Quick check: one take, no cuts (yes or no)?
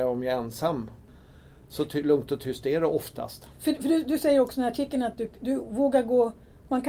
yes